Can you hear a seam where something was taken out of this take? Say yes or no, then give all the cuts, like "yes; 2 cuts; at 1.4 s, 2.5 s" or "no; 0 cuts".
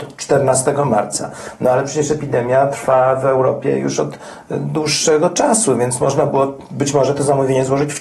no; 0 cuts